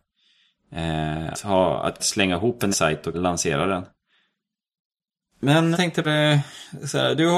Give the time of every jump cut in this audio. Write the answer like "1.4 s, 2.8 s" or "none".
1.3 s, 2.0 s, 2.7 s, 3.1 s, 5.7 s, 6.0 s